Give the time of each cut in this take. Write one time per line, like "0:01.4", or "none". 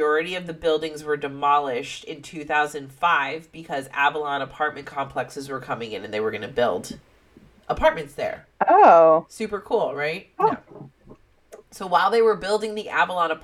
none